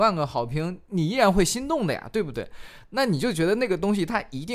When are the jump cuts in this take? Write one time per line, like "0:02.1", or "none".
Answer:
none